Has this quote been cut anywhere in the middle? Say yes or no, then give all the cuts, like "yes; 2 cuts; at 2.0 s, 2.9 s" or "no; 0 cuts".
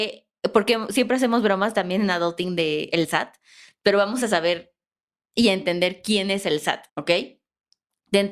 yes; 1 cut; at 6.9 s